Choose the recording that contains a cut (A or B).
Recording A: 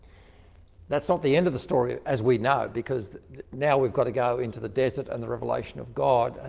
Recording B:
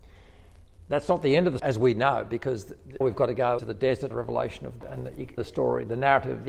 B